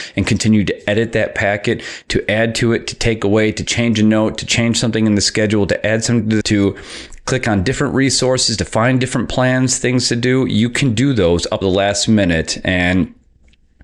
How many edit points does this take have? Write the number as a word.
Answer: two